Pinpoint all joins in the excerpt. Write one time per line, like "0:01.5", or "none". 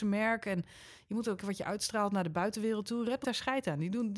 0:01.4
0:03.2

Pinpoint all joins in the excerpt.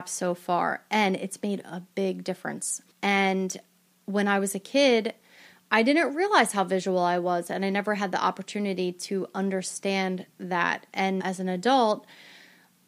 0:02.9
0:11.2

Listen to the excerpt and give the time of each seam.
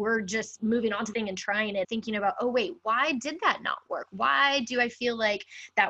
0:01.1
0:01.8

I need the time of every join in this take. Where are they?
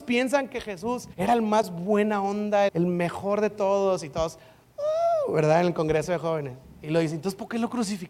0:01.1
0:02.7

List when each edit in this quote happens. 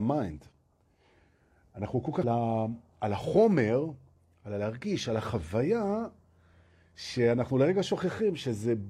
0:02.2

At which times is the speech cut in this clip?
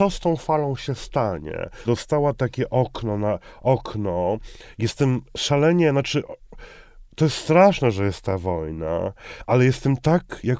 0:01.9

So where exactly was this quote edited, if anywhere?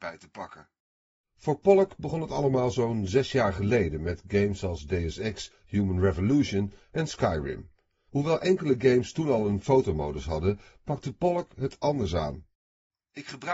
none

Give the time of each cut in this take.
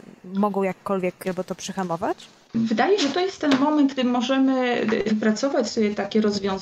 0:01.2
0:03.0
0:04.0
0:05.1

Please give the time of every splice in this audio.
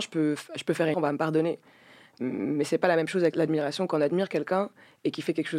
0:00.9

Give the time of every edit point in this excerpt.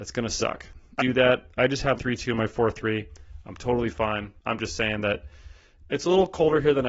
0:01.0
0:02.0
0:04.4

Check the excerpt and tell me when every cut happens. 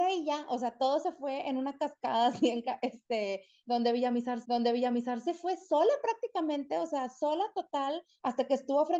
0:04.4

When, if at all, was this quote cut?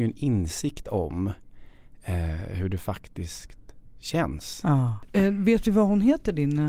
none

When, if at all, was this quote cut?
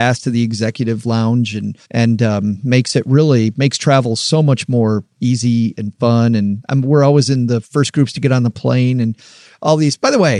0:01.8

